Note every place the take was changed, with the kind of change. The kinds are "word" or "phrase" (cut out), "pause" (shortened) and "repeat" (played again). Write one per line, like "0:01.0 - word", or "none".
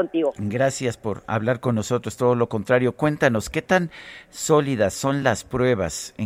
none